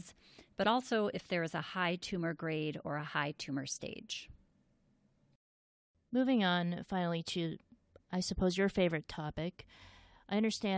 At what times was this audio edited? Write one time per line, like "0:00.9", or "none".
none